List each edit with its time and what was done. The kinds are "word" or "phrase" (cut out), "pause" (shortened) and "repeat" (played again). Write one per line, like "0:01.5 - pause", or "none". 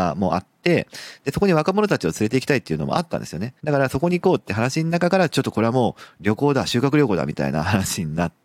0:03.6 - pause